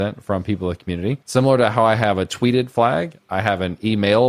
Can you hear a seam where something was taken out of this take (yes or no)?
yes